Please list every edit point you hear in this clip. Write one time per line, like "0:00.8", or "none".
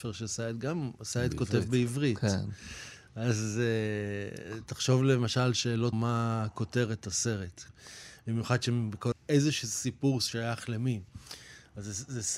0:05.9
0:09.1